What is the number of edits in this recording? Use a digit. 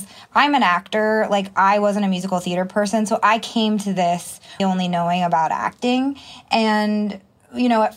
1